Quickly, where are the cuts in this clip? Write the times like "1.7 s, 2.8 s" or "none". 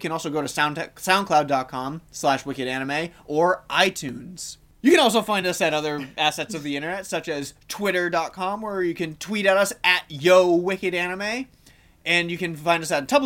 none